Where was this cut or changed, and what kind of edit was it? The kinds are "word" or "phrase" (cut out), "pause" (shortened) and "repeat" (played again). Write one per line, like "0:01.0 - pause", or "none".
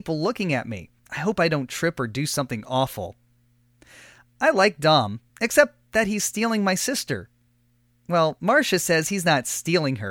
0:01.0 - pause
0:05.3 - pause